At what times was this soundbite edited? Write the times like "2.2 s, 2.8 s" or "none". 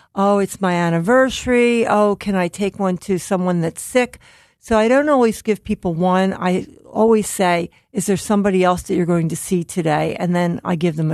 none

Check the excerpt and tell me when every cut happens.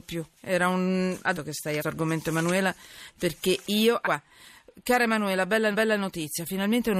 1.3 s, 1.8 s, 4.0 s, 5.7 s

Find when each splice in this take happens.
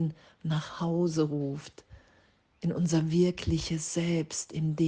none

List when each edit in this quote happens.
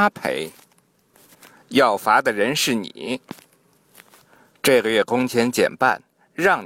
none

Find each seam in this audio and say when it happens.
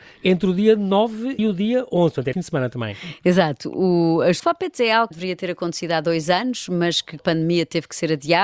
1.4 s, 2.3 s, 4.4 s, 5.1 s, 7.2 s

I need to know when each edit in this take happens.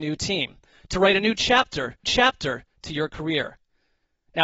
2.0 s

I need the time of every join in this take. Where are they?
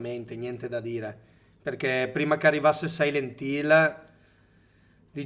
none

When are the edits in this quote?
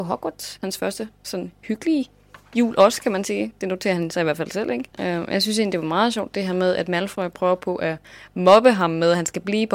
4.9 s

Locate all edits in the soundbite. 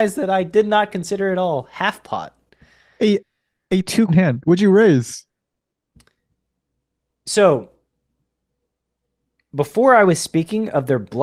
4.1 s

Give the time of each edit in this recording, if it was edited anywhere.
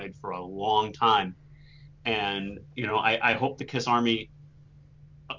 none

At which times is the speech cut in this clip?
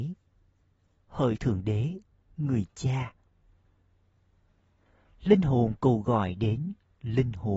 none

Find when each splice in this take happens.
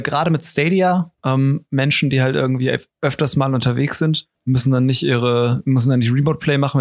1.2 s, 2.9 s, 4.3 s

